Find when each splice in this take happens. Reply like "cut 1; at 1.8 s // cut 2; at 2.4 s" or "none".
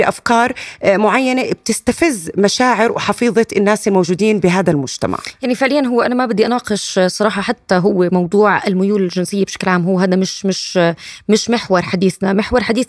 none

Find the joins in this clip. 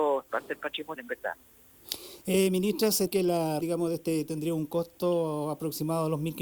cut 1; at 1.0 s // cut 2; at 3.1 s // cut 3; at 3.6 s // cut 4; at 4.3 s

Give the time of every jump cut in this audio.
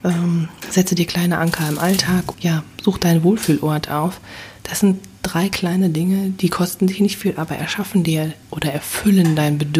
cut 1; at 2.3 s // cut 2; at 4.6 s // cut 3; at 8.4 s

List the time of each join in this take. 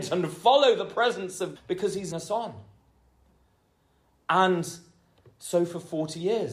cut 1; at 1.6 s // cut 2; at 2.1 s

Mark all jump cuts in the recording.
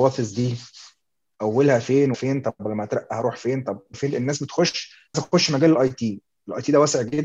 cut 1; at 2.1 s // cut 2; at 3.9 s // cut 3; at 5.1 s

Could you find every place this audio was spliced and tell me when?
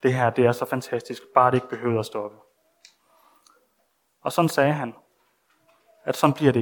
none

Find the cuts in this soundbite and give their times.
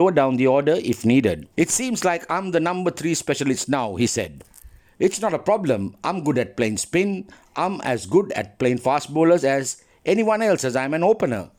cut 1; at 1.5 s

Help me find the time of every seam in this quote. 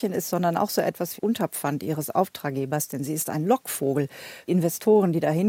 cut 1; at 1.2 s // cut 2; at 4.5 s

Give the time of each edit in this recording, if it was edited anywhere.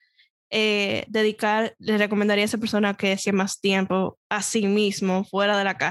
cut 1; at 3.2 s

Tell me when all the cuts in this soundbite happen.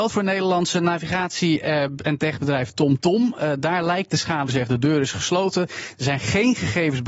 cut 1; at 4.5 s

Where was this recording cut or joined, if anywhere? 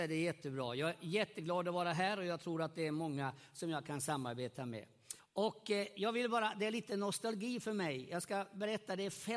cut 1; at 5.2 s

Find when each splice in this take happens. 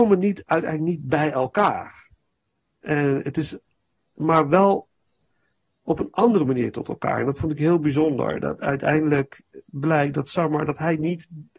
none

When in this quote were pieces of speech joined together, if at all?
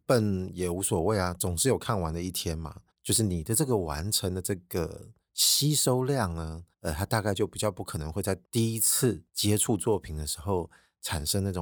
cut 1; at 2.9 s // cut 2; at 5.3 s // cut 3; at 6.7 s // cut 4; at 8.4 s // cut 5; at 9.3 s

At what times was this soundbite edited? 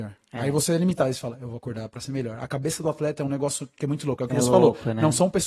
none

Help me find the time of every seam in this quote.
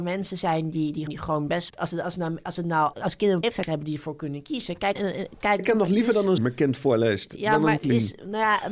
cut 1; at 1.1 s // cut 2; at 1.7 s // cut 3; at 2.9 s // cut 4; at 3.4 s // cut 5; at 5.0 s // cut 6; at 5.6 s // cut 7; at 6.4 s // cut 8; at 7.8 s

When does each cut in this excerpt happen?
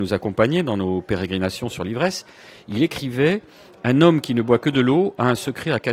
none

